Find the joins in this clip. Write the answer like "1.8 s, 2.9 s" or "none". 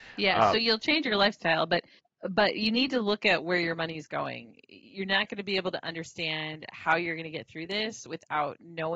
2.0 s